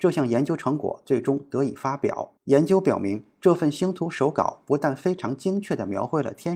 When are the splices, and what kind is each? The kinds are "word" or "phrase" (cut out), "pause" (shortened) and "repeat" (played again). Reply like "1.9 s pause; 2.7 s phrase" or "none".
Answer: 2.4 s pause